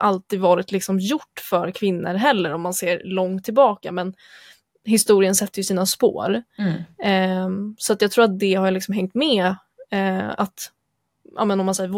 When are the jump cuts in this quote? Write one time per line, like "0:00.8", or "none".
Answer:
none